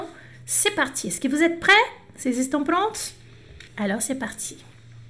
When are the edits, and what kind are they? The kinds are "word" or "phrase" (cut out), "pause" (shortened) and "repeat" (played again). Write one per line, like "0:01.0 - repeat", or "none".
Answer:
0:03.7 - pause